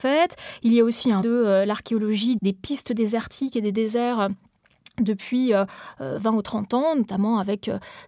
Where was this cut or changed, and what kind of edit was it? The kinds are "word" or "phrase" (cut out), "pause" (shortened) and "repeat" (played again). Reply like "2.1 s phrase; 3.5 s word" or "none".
1.2 s word; 2.4 s word